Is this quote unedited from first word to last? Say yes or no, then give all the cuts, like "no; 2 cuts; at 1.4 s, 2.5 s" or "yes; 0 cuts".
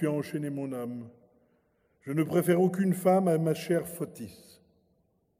yes; 0 cuts